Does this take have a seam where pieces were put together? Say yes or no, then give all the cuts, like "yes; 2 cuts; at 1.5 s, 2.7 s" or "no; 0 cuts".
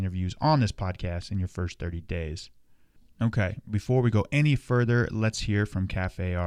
no; 0 cuts